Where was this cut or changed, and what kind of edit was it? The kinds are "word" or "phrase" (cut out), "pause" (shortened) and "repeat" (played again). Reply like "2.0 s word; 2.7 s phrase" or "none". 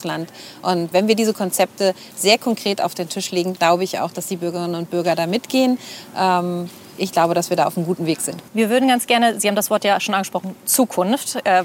0.9 s word; 8.5 s pause